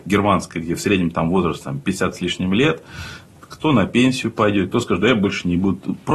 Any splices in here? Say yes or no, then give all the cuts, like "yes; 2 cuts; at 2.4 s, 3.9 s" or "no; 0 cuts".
no; 0 cuts